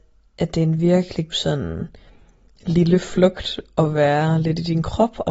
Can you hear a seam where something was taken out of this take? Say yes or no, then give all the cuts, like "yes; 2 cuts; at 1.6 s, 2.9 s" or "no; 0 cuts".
yes; 1 cut; at 1.3 s